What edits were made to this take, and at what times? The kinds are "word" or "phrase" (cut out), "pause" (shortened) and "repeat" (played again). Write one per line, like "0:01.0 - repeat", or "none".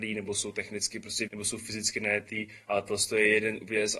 0:01.3 - word